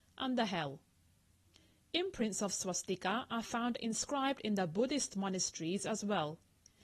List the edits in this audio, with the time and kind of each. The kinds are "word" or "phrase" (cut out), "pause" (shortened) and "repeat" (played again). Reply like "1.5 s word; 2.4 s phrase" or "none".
none